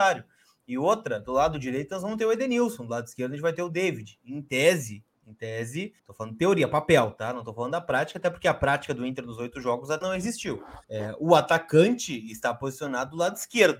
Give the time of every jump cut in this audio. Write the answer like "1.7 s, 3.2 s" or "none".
6.0 s, 10.0 s, 10.8 s

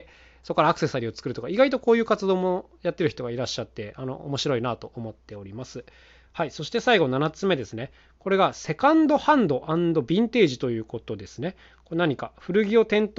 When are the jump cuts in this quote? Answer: none

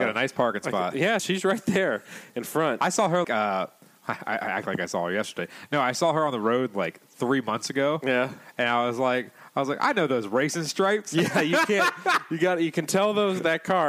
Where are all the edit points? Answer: 1.2 s, 3.2 s

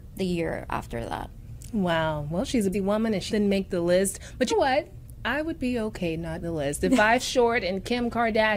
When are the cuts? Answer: 2.7 s, 3.3 s, 4.5 s, 6.4 s, 7.2 s

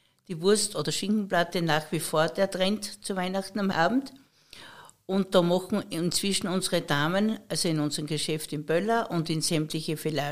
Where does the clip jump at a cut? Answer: 3.7 s

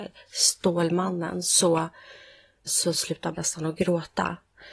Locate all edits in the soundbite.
2.7 s, 3.3 s

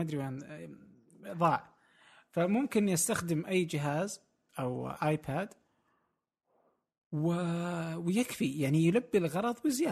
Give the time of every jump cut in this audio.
4.5 s

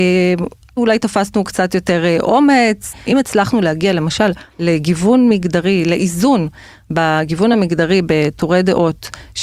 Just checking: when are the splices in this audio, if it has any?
none

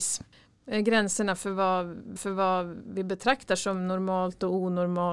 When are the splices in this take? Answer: 2.2 s

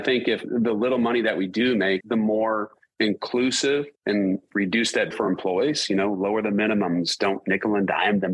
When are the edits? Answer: 2.0 s, 5.1 s

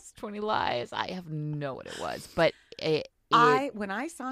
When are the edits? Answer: 1.7 s

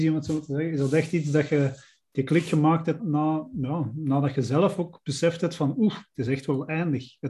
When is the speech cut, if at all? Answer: 3.0 s

